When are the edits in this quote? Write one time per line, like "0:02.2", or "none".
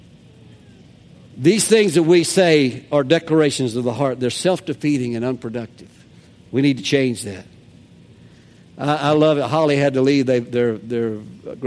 0:06.1